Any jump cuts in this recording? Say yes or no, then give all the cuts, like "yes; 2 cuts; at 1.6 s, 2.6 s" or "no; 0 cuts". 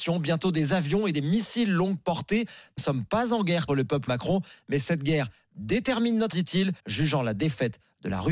yes; 6 cuts; at 1.1 s, 2.8 s, 3.7 s, 4.1 s, 6.3 s, 6.8 s